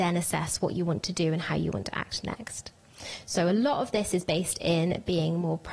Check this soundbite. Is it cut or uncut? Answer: uncut